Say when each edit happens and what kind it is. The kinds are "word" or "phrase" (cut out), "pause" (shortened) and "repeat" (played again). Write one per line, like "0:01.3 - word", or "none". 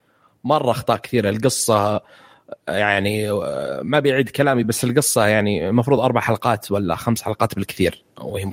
none